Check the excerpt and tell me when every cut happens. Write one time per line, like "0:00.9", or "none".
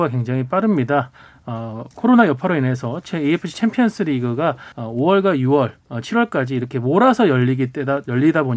0:01.9
0:04.7
0:05.8